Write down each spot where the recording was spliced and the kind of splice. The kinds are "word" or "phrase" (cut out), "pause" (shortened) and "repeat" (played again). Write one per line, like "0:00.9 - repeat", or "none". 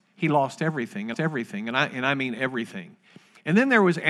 0:01.1 - repeat